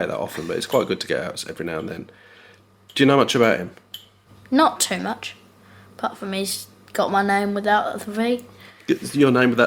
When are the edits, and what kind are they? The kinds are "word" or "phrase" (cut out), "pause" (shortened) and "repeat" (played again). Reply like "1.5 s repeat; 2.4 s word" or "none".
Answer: none